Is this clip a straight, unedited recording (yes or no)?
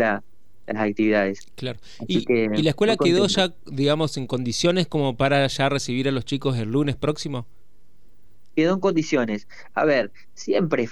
yes